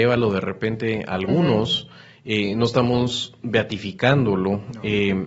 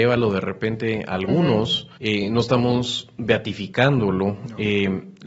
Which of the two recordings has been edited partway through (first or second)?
second